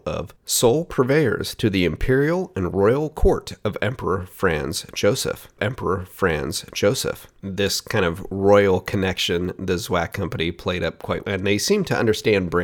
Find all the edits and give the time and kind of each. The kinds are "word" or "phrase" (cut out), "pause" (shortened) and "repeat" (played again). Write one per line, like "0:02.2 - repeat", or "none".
0:05.6 - repeat
0:11.2 - word